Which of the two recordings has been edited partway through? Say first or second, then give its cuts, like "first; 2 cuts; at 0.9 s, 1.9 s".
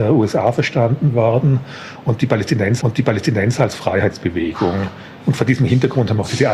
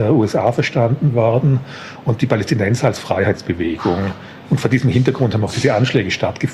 first; 1 cut; at 2.8 s